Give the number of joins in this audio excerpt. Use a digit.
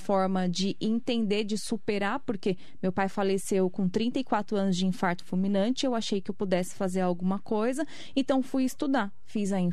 0